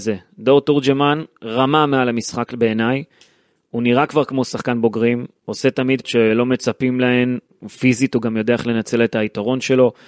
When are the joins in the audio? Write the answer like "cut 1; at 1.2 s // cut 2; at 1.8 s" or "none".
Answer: cut 1; at 6.0 s